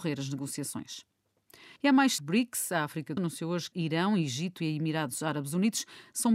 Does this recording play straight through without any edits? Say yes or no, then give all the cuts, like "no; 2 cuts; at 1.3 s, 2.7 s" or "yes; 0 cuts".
no; 5 cuts; at 1.8 s, 2.2 s, 3.2 s, 3.7 s, 4.6 s